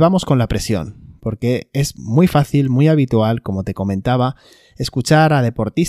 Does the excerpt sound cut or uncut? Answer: uncut